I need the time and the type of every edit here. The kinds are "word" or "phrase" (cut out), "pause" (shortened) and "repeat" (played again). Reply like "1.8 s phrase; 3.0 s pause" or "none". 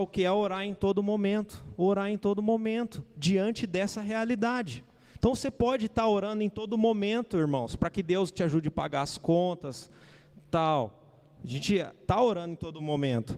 none